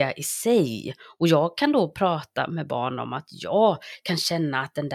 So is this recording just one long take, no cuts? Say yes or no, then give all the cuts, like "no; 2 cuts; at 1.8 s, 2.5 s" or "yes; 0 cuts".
yes; 0 cuts